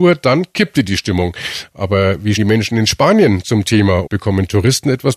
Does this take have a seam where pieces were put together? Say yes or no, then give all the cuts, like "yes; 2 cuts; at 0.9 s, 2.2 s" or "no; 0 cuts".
yes; 2 cuts; at 2.4 s, 4.1 s